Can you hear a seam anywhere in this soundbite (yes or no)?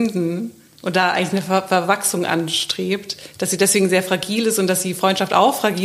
no